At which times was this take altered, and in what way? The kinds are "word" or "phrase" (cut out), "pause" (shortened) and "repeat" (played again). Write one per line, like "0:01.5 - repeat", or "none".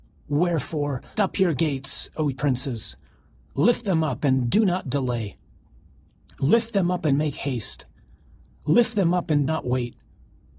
0:01.1 - word
0:02.3 - word
0:09.5 - word